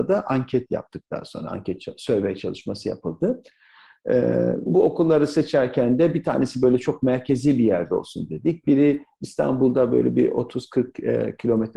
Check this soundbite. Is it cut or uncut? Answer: cut